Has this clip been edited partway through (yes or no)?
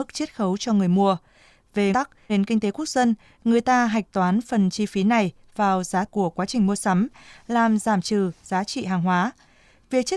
yes